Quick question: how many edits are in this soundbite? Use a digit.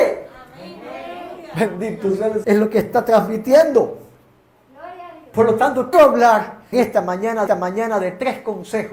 4